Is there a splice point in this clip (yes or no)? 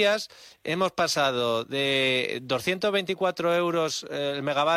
no